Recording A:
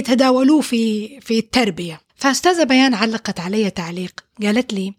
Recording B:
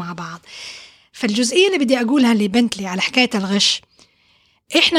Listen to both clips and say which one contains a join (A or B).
A